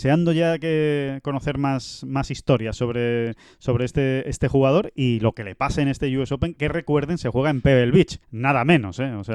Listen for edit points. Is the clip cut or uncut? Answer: cut